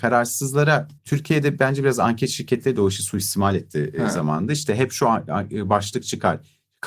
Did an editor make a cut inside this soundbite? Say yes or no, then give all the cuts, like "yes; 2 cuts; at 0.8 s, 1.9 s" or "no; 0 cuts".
yes; 1 cut; at 1.0 s